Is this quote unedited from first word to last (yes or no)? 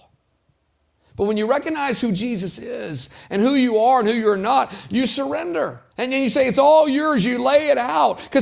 no